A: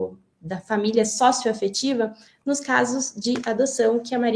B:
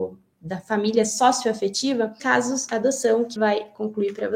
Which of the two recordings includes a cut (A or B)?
B